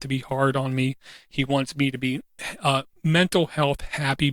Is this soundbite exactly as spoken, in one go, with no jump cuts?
yes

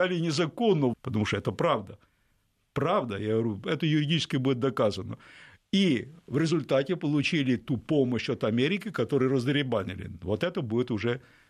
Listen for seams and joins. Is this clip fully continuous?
no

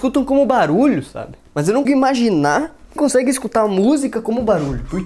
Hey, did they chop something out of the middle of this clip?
yes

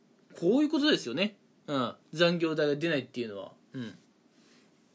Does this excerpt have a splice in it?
no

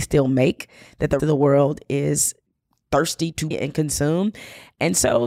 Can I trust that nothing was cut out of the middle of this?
no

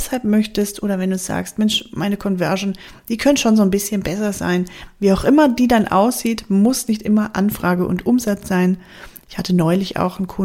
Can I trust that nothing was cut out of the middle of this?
yes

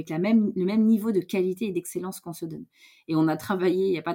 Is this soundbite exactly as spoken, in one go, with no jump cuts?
yes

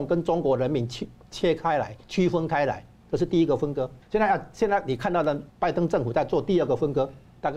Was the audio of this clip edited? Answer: yes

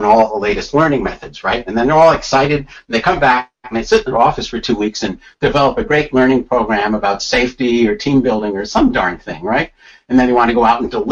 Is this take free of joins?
yes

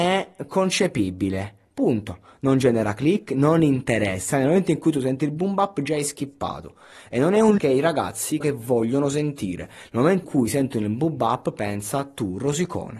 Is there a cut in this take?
yes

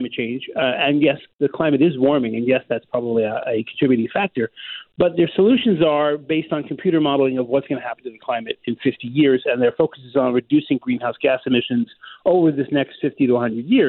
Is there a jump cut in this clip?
no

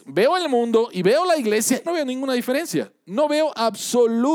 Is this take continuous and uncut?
no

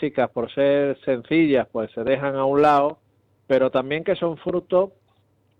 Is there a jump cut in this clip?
no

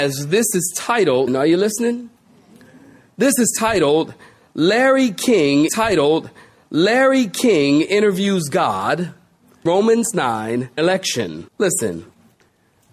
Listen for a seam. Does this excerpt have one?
yes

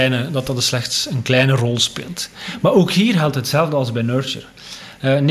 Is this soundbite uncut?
yes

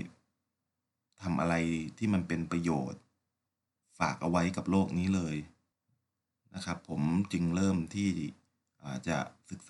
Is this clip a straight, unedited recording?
yes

